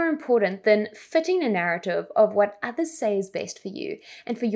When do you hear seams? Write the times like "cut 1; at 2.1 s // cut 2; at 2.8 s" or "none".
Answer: none